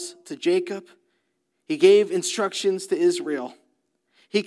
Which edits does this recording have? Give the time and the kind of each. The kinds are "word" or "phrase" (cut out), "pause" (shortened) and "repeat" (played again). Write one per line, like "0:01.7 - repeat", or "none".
none